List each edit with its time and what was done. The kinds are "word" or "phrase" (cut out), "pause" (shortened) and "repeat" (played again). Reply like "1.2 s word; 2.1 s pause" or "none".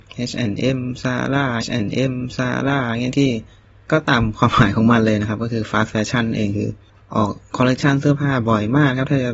1.6 s repeat